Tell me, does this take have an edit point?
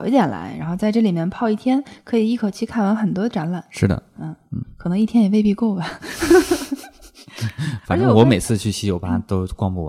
no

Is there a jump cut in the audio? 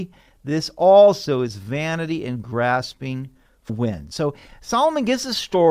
yes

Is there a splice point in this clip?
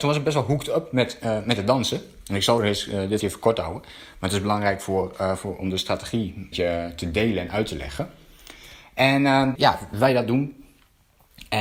yes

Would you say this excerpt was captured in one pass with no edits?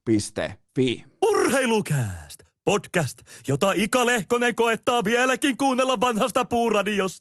yes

